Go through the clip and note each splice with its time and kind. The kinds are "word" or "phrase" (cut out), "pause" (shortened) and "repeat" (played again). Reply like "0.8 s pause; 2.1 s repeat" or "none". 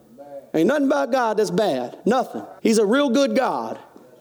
2.6 s pause